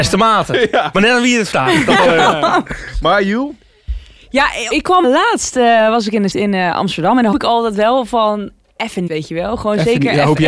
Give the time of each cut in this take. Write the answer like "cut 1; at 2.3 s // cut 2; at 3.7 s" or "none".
cut 1; at 0.9 s // cut 2; at 4.7 s // cut 3; at 5.0 s // cut 4; at 6.3 s // cut 5; at 7.3 s // cut 6; at 9.1 s